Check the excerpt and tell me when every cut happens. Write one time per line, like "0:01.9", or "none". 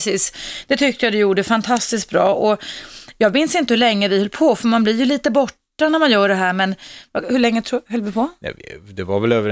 none